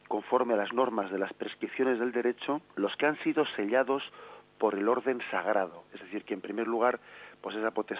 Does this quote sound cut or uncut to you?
cut